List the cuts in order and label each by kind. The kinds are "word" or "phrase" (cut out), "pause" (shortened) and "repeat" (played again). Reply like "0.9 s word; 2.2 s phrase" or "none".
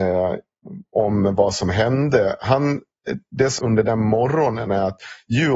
3.6 s word